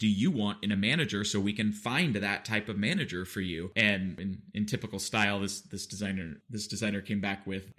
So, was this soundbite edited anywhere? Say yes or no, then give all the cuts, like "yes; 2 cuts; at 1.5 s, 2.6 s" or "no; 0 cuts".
no; 0 cuts